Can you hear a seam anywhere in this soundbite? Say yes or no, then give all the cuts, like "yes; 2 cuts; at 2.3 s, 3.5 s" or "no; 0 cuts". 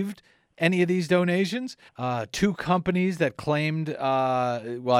yes; 1 cut; at 1.9 s